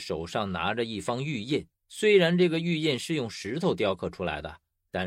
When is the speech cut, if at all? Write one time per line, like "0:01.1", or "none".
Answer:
0:01.8

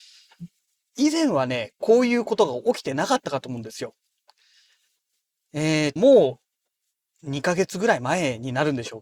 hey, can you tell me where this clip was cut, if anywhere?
0:06.0

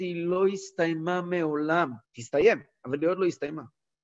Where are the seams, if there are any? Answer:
0:02.0

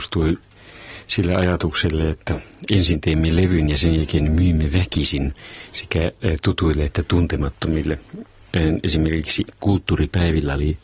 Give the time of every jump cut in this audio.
none

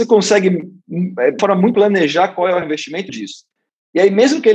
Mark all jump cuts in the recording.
0:01.4
0:01.7
0:02.6
0:03.1

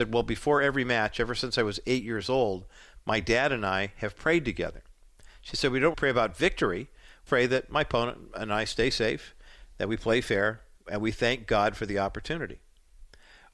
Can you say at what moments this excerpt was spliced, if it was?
0:05.9
0:07.3

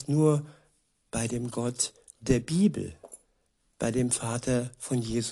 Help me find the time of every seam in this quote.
none

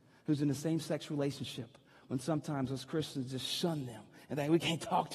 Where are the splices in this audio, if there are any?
none

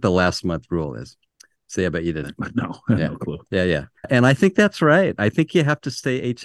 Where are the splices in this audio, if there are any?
0:01.3
0:02.2
0:04.0

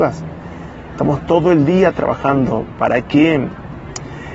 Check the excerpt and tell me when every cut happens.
none

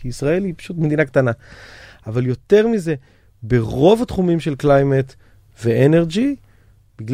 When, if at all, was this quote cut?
none

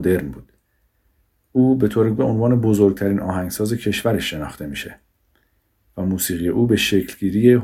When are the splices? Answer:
0:02.2

